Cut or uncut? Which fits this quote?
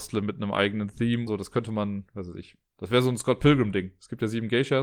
cut